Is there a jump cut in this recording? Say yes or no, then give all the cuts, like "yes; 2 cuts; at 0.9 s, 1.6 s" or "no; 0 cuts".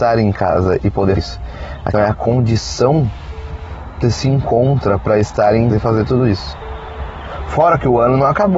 yes; 4 cuts; at 1.2 s, 1.9 s, 4.0 s, 5.7 s